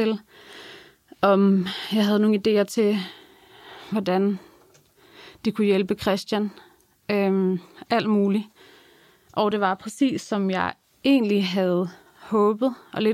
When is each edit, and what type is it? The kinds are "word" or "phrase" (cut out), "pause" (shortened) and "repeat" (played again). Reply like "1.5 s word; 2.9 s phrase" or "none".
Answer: none